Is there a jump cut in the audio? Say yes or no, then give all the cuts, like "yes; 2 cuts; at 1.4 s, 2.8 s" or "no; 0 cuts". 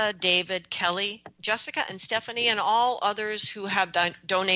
no; 0 cuts